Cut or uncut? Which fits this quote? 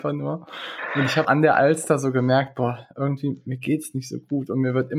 cut